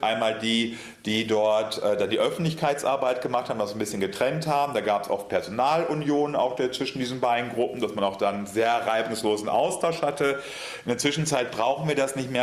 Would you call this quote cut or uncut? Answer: uncut